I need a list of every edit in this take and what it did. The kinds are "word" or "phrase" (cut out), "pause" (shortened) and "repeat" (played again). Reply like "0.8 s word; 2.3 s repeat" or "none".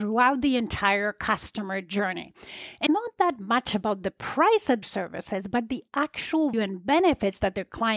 2.9 s word; 4.8 s phrase; 6.5 s word